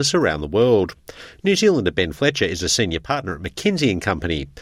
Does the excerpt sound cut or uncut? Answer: uncut